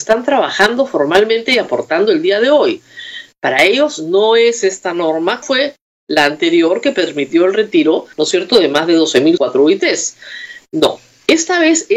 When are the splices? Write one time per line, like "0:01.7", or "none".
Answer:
0:05.4
0:08.1
0:09.4